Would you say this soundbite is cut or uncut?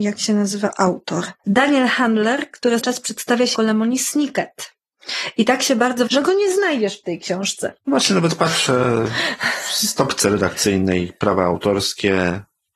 cut